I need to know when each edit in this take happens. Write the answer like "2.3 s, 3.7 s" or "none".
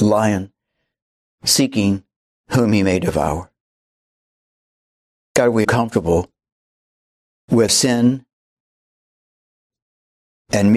5.6 s, 7.7 s